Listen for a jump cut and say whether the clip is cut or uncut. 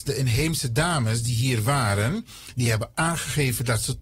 uncut